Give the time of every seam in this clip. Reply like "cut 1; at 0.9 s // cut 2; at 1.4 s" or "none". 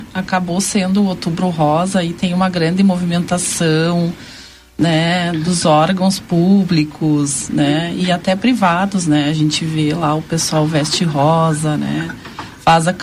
none